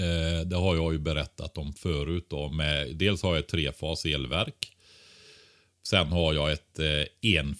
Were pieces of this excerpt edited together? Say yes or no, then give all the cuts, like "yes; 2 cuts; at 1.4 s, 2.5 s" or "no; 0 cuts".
no; 0 cuts